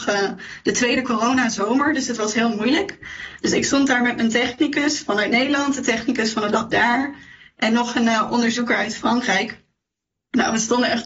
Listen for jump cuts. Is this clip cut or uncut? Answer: uncut